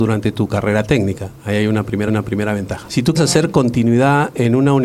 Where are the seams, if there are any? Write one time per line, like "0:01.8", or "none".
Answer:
0:02.1
0:03.2